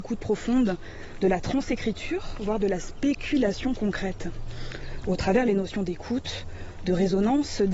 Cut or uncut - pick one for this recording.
uncut